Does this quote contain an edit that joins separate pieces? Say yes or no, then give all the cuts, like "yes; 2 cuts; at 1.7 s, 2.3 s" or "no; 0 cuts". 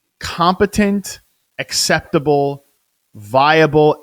no; 0 cuts